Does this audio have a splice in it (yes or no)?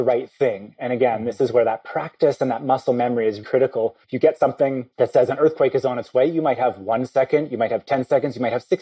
yes